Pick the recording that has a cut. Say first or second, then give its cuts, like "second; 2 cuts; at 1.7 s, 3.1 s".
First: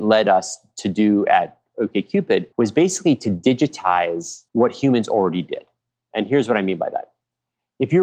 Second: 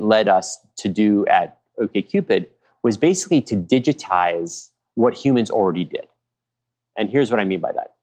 first; 3 cuts; at 2.5 s, 4.5 s, 5.8 s